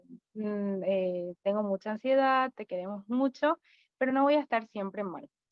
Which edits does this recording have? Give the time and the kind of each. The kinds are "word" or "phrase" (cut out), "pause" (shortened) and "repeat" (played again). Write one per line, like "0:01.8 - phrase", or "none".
none